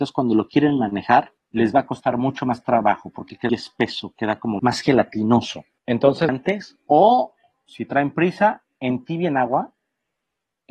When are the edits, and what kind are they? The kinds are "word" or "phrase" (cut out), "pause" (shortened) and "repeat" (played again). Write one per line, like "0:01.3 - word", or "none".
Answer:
0:01.4 - pause
0:03.5 - word
0:04.6 - word
0:06.3 - phrase